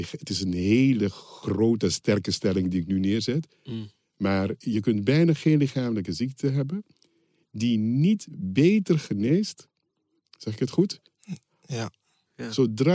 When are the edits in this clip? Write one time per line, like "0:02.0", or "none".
none

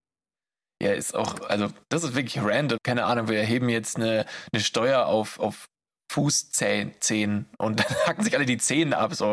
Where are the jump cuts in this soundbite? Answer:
0:02.8

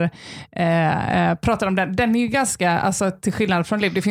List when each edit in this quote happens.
none

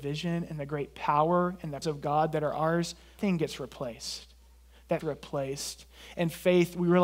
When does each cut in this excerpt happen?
0:01.8
0:03.2
0:05.0

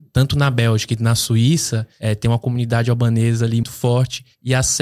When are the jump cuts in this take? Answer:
0:03.6

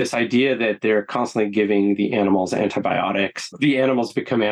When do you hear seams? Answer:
none

